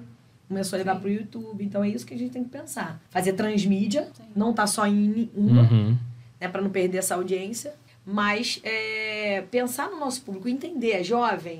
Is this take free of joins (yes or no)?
no